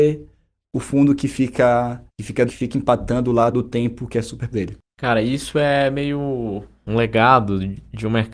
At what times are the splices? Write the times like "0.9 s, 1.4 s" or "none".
2.1 s, 2.5 s, 3.5 s, 4.5 s